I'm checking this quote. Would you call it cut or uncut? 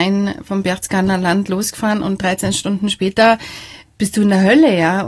uncut